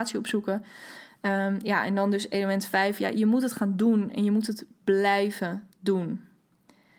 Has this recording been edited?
yes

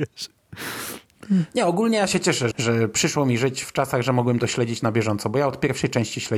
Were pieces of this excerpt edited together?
yes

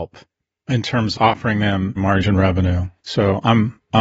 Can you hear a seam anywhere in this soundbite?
yes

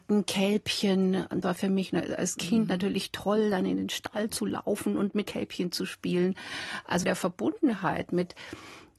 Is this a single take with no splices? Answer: no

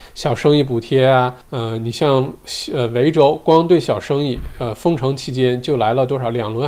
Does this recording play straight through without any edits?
no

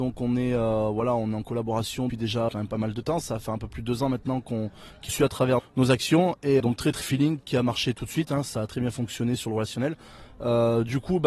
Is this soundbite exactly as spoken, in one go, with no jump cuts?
no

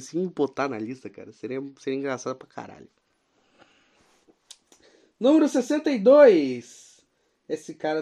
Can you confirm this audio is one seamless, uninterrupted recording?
yes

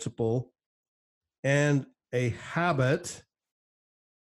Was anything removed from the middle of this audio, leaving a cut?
no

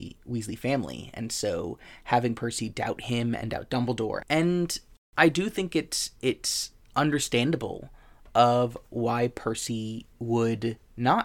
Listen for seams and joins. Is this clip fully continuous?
no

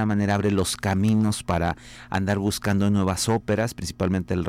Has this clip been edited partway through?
no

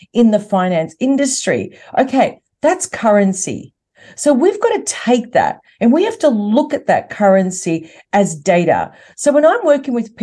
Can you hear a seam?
no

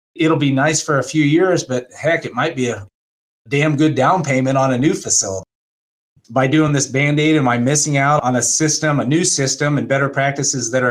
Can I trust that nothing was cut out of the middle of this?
yes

